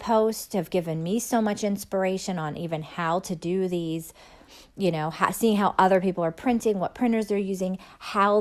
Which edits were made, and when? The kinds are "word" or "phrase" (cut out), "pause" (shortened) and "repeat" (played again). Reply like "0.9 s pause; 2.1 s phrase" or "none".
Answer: none